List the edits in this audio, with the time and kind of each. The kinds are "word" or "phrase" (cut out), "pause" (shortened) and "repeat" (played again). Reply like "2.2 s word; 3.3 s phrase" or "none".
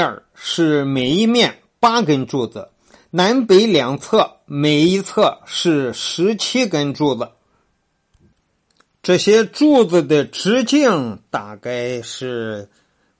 none